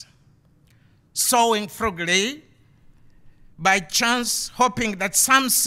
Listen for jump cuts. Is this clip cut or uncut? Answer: uncut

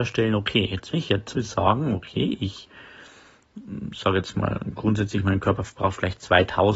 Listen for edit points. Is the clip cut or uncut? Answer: cut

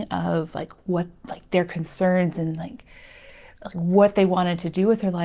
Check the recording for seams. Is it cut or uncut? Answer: uncut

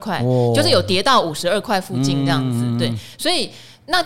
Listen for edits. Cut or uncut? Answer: uncut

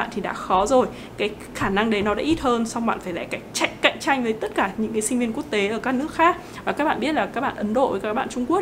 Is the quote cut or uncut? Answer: uncut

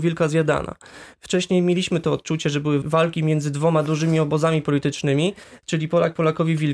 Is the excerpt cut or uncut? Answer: cut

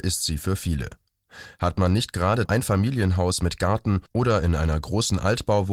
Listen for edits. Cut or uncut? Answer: cut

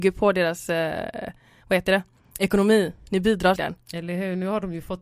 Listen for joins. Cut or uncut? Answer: cut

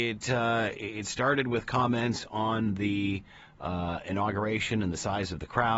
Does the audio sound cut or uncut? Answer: uncut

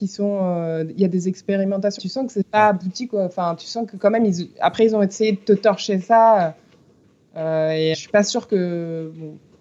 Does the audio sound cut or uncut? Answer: cut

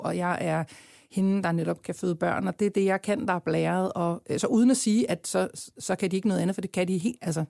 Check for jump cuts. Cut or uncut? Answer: uncut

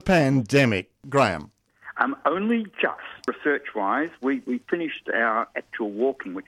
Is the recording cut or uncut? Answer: uncut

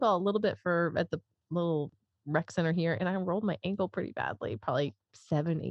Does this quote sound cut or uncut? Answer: uncut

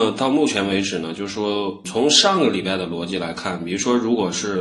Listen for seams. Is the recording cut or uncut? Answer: cut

